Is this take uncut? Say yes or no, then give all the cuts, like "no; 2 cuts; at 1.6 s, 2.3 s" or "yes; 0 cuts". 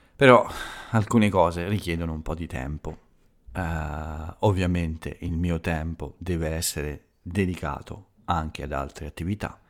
yes; 0 cuts